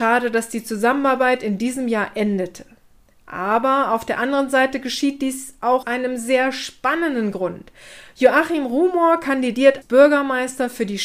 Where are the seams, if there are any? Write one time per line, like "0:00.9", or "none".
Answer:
0:05.8
0:09.8